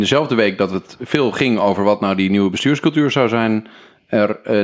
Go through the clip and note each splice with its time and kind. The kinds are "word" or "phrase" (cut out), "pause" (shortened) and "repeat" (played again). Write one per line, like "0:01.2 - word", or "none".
none